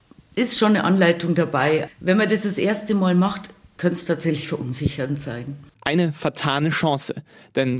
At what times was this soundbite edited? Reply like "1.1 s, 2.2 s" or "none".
1.9 s